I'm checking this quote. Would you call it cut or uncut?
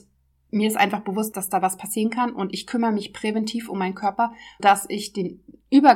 cut